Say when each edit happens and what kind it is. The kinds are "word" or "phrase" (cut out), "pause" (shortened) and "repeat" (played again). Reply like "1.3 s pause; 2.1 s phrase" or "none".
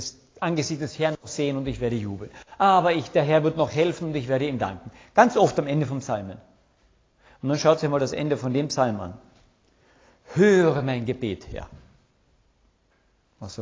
none